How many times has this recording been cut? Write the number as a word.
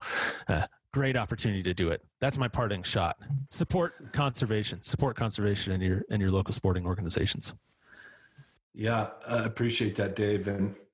one